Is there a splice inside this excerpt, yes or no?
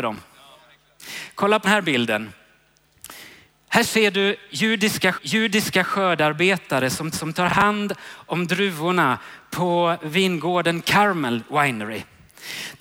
yes